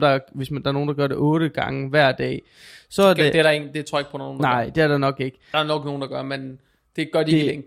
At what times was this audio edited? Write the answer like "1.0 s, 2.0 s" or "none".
5.5 s